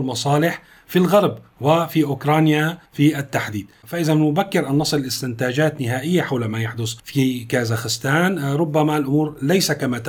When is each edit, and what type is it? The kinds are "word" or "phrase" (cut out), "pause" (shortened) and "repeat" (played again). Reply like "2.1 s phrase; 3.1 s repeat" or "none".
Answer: 2.9 s pause; 7.0 s pause